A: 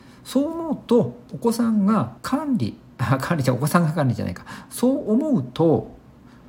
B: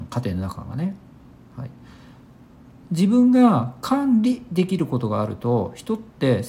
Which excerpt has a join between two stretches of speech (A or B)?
A